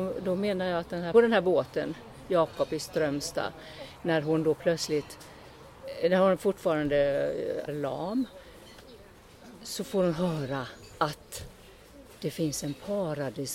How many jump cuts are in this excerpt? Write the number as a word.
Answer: two